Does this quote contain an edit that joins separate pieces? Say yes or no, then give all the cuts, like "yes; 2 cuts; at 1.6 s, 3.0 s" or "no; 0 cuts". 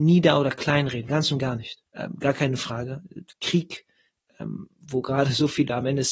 yes; 1 cut; at 1.1 s